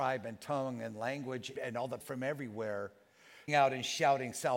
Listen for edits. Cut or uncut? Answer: cut